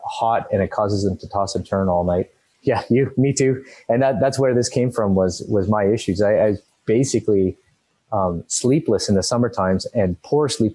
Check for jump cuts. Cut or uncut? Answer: uncut